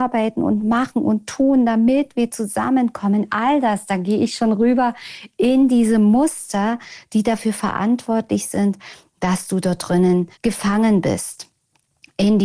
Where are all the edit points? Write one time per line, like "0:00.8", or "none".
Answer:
0:10.3